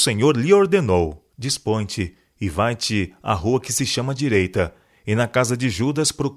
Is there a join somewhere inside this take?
yes; 1 cut; at 1.3 s

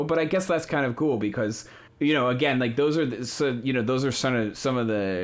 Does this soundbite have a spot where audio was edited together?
yes; 1 cut; at 1.9 s

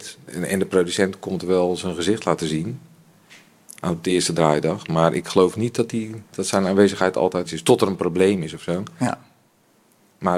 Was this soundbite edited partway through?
yes; 1 cut; at 7.5 s

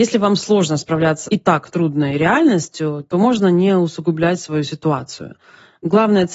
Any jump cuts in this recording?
yes; 1 cut; at 1.3 s

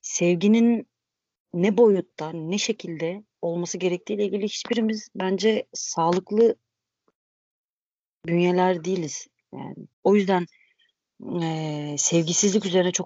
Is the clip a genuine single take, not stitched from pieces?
no; 2 cuts; at 3.3 s, 9.9 s

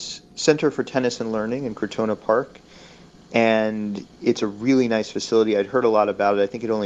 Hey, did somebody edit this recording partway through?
no; 0 cuts

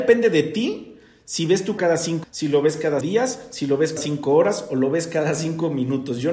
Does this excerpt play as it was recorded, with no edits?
no; 4 cuts; at 1.8 s, 2.2 s, 3.0 s, 4.0 s

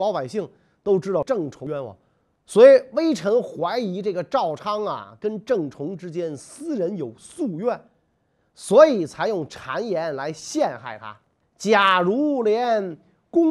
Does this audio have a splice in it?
yes; 1 cut; at 11.4 s

